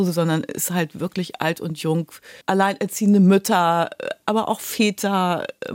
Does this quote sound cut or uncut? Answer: cut